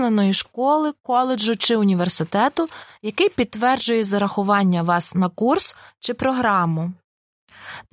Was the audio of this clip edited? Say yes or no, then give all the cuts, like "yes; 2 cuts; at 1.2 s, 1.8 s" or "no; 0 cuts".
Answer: no; 0 cuts